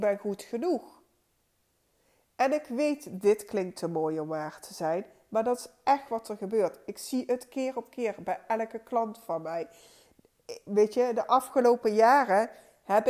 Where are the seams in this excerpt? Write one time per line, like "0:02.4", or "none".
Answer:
none

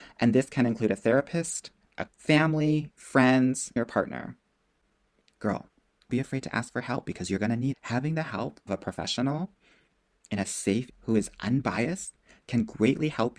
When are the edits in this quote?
0:02.1
0:03.8
0:06.1
0:07.7
0:08.7
0:10.9

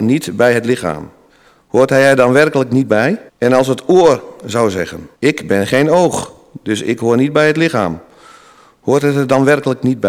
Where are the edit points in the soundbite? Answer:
0:01.3
0:03.3
0:05.1

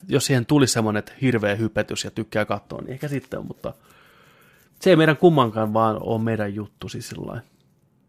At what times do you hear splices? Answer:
none

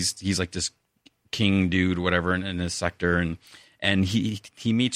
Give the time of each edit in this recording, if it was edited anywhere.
none

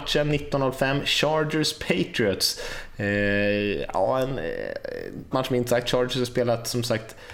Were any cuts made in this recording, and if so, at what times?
0:05.3

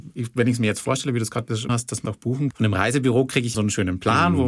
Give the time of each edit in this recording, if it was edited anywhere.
0:01.7
0:02.1
0:02.5
0:03.5

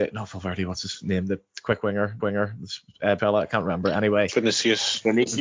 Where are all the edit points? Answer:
0:02.2
0:03.2

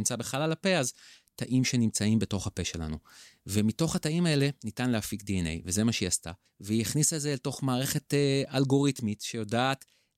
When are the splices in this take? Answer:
0:06.5

